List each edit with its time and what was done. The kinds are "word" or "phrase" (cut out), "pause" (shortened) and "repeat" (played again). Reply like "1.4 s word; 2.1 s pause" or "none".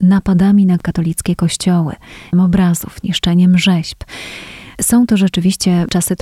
2.3 s word